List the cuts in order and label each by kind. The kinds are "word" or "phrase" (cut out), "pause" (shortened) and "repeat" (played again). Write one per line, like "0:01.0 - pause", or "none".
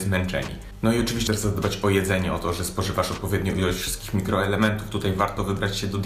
0:01.3 - word